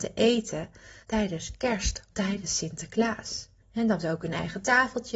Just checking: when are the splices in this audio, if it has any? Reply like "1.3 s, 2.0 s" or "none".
1.0 s, 2.1 s, 3.6 s, 4.0 s